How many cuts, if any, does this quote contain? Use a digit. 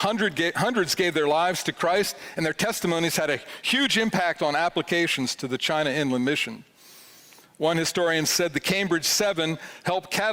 0